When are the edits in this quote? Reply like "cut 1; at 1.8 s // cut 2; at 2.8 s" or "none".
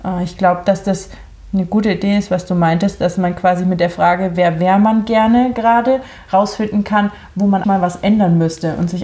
cut 1; at 7.6 s